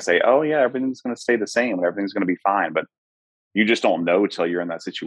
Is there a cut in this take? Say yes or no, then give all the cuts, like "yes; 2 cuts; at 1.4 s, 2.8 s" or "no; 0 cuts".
no; 0 cuts